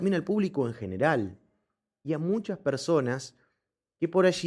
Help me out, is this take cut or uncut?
uncut